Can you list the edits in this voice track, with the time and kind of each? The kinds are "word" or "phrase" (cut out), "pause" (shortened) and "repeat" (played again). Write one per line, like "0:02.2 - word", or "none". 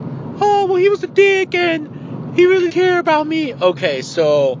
0:02.3 - word
0:02.7 - word